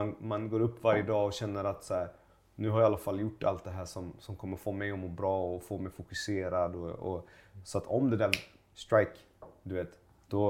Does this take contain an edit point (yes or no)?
no